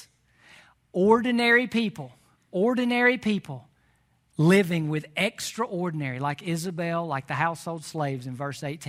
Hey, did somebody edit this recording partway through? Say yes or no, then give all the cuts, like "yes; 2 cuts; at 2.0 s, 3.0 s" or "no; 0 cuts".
no; 0 cuts